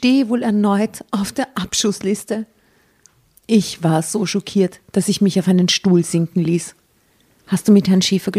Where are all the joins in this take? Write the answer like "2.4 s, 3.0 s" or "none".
none